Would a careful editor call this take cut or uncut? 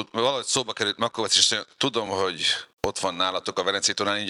uncut